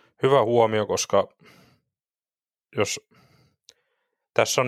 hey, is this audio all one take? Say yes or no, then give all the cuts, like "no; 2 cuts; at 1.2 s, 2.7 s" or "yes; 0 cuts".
yes; 0 cuts